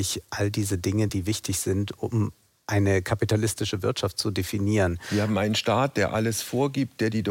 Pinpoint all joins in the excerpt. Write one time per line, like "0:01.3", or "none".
none

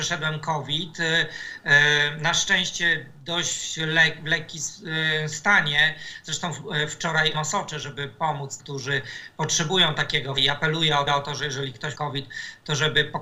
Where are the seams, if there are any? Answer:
0:07.3
0:08.6
0:10.4
0:11.1
0:11.9

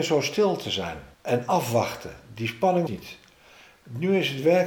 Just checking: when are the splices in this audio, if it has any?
0:01.1
0:02.9

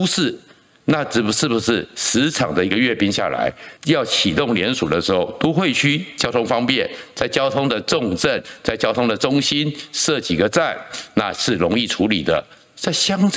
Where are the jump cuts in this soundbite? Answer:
0:03.8

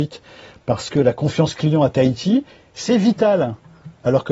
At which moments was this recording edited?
none

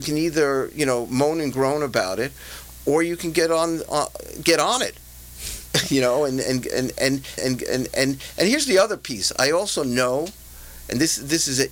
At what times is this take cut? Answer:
0:03.9
0:07.4

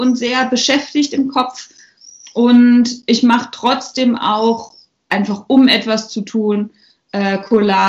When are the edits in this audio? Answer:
none

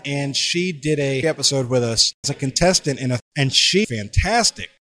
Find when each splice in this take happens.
0:01.2
0:02.2
0:03.2
0:03.8

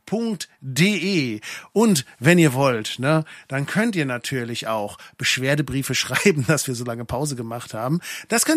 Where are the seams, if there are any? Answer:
none

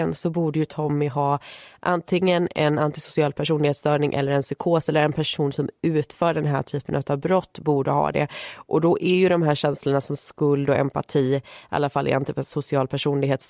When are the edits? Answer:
none

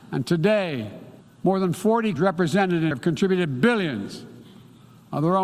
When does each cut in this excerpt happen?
0:01.2
0:02.2
0:02.9

